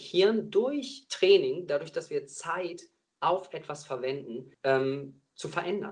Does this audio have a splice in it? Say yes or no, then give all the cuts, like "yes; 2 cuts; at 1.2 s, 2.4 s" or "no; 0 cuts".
yes; 1 cut; at 4.5 s